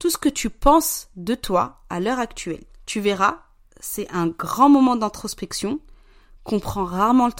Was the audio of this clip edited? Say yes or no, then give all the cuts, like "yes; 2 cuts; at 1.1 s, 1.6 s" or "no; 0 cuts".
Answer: yes; 1 cut; at 2.7 s